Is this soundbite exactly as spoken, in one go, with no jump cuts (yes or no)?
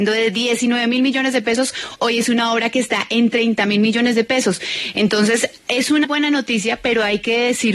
no